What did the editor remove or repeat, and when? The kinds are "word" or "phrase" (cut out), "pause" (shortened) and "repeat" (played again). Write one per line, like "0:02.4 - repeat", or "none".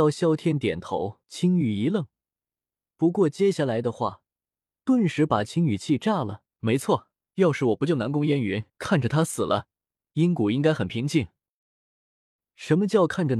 0:01.2 - pause
0:06.5 - pause
0:07.2 - pause
0:08.7 - pause